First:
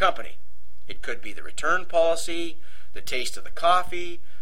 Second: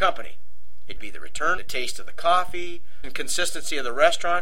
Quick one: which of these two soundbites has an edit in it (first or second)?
second